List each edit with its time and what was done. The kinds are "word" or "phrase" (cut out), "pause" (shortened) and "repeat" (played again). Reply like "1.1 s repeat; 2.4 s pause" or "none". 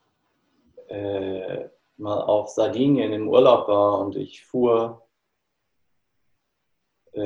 none